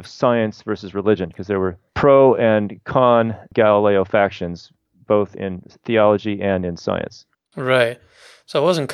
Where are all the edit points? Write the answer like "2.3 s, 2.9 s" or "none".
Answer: none